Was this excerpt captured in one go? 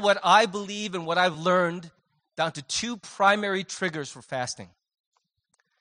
yes; 0 cuts

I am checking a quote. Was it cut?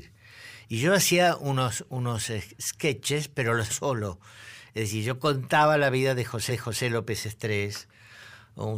yes; 2 cuts; at 3.7 s, 6.5 s

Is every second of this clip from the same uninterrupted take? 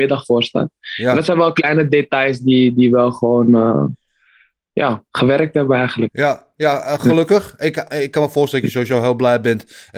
no; 1 cut; at 5.1 s

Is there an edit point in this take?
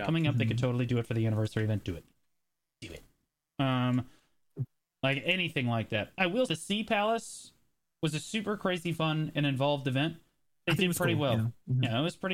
yes; 1 cut; at 6.5 s

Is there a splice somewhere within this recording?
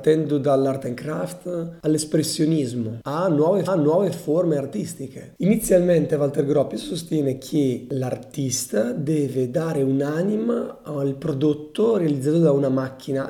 yes; 1 cut; at 3.7 s

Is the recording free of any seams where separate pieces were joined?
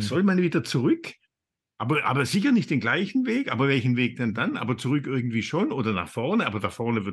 yes; 0 cuts

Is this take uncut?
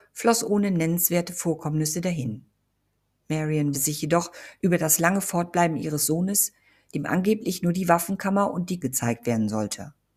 no; 2 cuts; at 3.7 s, 8.8 s

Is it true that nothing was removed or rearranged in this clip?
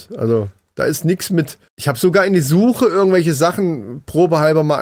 no; 1 cut; at 1.7 s

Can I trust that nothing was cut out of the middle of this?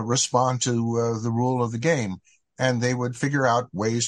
yes; 0 cuts

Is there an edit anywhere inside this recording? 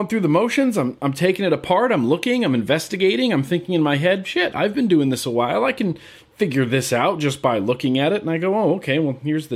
no; 0 cuts

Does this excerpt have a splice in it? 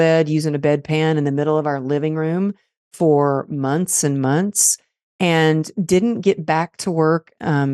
no; 0 cuts

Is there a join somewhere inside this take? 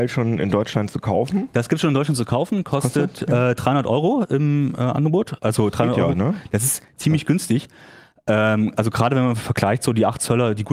no; 0 cuts

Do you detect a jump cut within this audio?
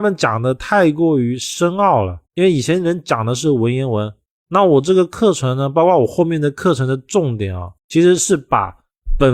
yes; 2 cuts; at 2.2 s, 7.8 s

